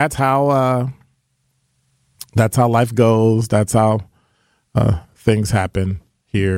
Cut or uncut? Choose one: uncut